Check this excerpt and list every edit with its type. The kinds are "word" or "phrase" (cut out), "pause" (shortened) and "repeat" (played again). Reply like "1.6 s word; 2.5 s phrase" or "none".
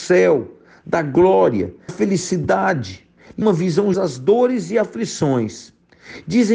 1.9 s word; 3.4 s word; 3.9 s phrase